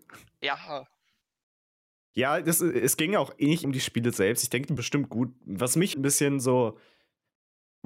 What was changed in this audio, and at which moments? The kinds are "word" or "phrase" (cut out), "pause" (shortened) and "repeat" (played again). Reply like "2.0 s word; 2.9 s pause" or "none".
3.6 s word; 4.8 s word; 5.9 s word